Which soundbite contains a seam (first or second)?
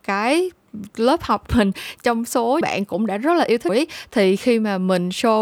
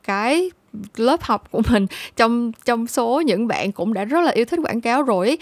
first